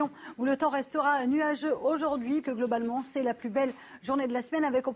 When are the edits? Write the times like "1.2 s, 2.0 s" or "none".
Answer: 2.4 s

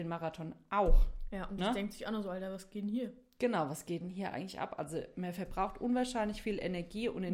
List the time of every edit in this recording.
none

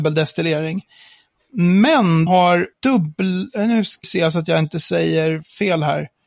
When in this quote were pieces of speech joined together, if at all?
2.3 s, 2.7 s, 4.0 s

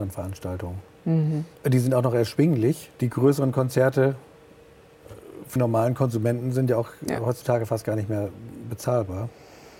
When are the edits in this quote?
1.5 s, 2.9 s, 5.6 s

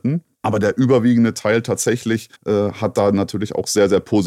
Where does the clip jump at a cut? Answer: 2.4 s

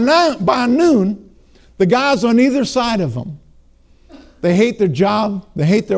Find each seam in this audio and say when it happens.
none

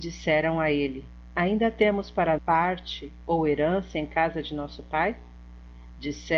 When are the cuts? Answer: 2.4 s

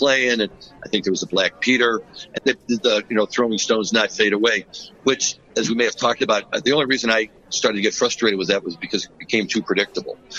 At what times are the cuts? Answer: 2.4 s

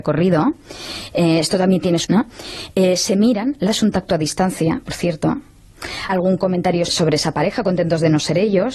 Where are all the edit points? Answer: 2.0 s, 3.7 s, 6.1 s, 6.9 s

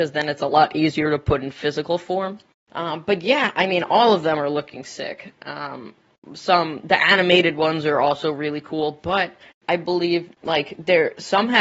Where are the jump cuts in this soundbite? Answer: 2.5 s, 10.3 s

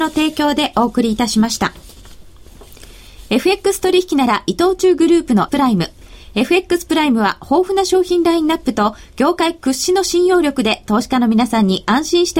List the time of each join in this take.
5.5 s

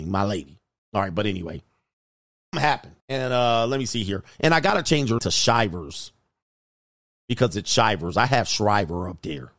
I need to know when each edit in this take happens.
2.5 s, 3.0 s, 5.2 s

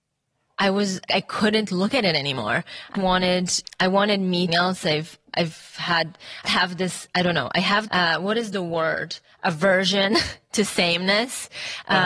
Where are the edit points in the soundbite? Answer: 1.1 s, 2.9 s, 3.6 s, 4.5 s, 6.5 s, 7.9 s

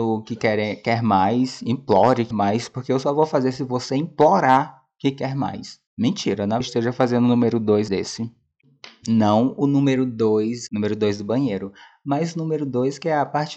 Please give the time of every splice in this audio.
2.3 s, 5.9 s, 6.6 s, 7.9 s, 10.7 s

